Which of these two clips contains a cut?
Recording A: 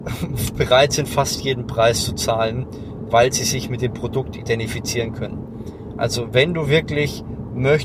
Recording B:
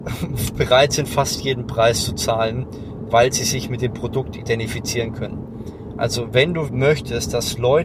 B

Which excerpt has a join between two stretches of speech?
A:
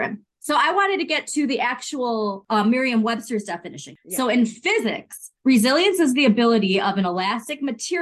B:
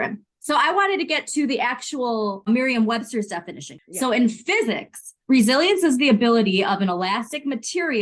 B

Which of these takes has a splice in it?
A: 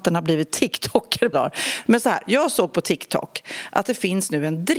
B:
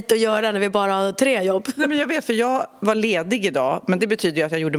A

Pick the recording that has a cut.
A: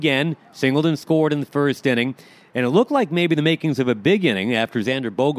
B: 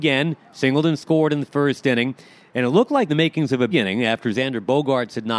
B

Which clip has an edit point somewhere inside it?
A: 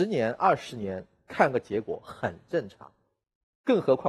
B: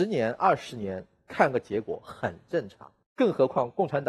B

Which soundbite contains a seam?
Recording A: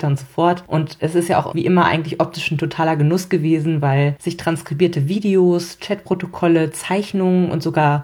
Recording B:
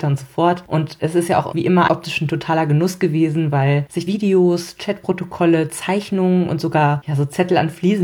B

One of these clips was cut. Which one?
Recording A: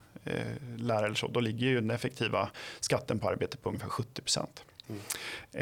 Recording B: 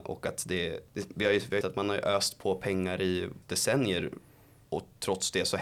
B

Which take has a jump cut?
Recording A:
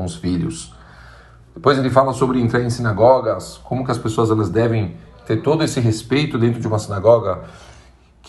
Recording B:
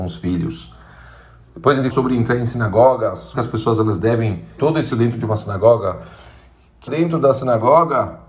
B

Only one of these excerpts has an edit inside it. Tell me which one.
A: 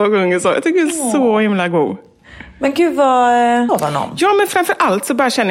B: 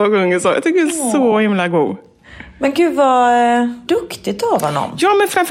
A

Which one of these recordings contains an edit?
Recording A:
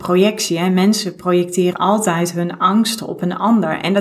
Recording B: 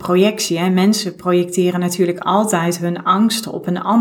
A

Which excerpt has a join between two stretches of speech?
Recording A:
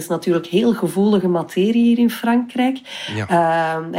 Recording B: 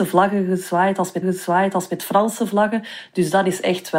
B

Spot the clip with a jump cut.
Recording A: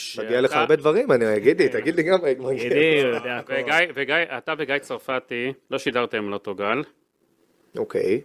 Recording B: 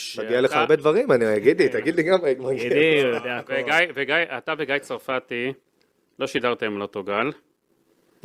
A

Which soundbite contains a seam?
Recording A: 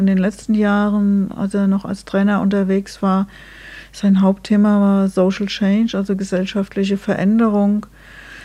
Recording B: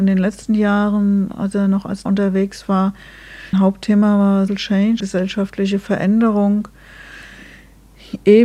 B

